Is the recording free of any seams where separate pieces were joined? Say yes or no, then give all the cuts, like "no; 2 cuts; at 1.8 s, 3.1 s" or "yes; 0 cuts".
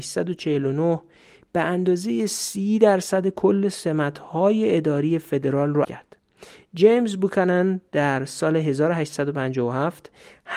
no; 1 cut; at 5.8 s